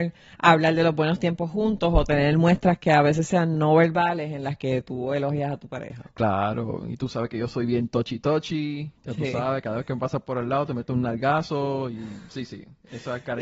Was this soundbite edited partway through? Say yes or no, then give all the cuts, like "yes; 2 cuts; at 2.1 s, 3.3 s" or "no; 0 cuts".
yes; 1 cut; at 9.0 s